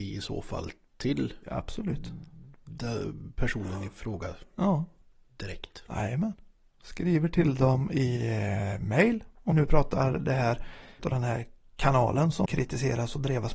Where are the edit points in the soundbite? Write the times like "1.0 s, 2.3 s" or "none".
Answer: 9.5 s, 11.0 s, 12.5 s